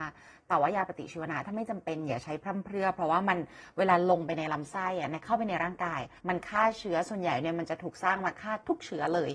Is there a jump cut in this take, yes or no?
yes